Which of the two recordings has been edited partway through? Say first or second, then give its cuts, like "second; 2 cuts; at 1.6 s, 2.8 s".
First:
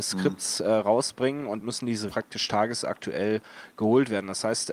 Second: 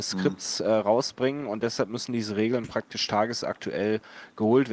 first; 2 cuts; at 1.6 s, 2.1 s